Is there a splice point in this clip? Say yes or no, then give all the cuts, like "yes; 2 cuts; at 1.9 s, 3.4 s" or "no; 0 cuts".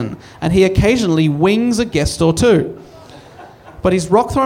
no; 0 cuts